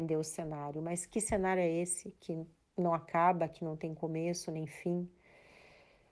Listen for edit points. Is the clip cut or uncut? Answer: uncut